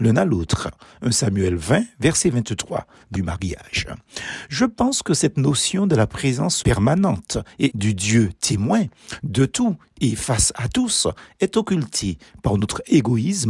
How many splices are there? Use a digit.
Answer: 3